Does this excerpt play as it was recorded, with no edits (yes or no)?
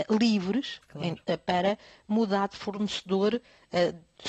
yes